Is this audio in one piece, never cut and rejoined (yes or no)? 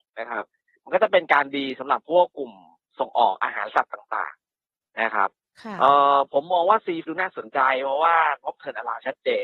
no